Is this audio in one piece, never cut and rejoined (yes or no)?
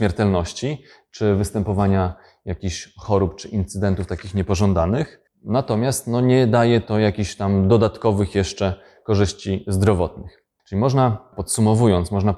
yes